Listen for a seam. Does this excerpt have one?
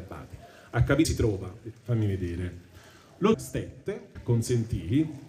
yes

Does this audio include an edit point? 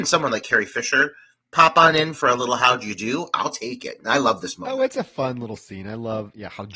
no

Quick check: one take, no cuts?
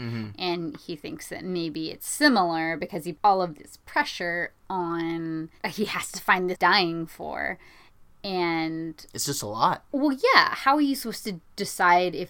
no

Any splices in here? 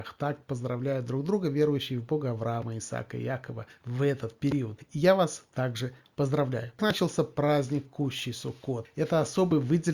no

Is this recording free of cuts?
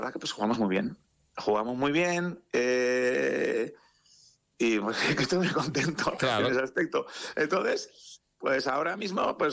yes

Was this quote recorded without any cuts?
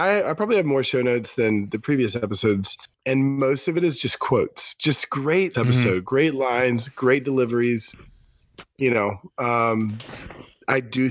no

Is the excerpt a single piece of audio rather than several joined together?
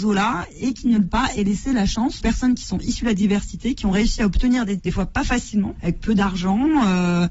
no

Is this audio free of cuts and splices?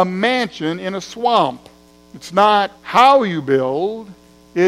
no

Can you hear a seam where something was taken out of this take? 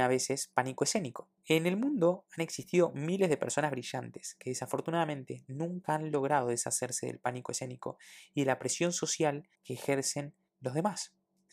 yes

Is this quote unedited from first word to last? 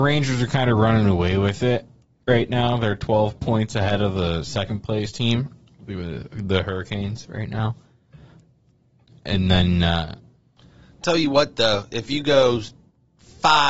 yes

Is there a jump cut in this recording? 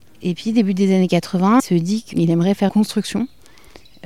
yes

